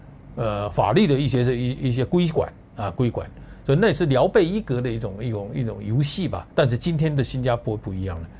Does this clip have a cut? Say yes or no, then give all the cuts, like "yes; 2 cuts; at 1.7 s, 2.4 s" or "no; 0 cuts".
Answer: yes; 1 cut; at 6.5 s